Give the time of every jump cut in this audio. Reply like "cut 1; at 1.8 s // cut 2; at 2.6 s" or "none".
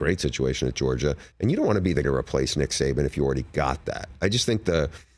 cut 1; at 1.3 s // cut 2; at 2.0 s